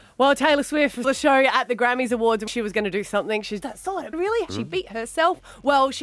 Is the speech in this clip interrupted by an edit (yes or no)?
yes